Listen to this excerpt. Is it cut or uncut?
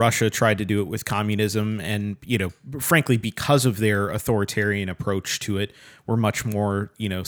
uncut